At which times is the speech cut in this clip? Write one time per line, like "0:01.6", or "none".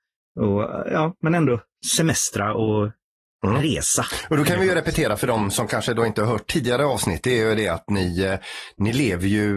none